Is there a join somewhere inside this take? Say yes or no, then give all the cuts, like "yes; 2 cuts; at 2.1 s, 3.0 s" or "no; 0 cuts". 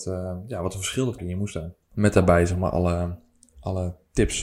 yes; 2 cuts; at 1.2 s, 1.8 s